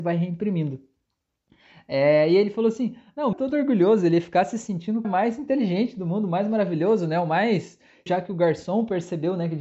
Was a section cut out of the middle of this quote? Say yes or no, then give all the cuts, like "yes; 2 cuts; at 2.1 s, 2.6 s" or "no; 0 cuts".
yes; 3 cuts; at 3.3 s, 5.0 s, 8.1 s